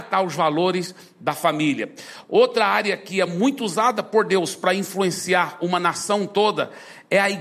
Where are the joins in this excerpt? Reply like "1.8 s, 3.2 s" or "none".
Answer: none